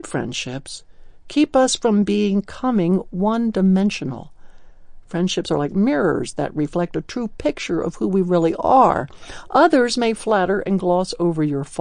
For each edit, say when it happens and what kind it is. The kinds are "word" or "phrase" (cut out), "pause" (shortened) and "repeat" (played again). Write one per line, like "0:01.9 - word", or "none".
none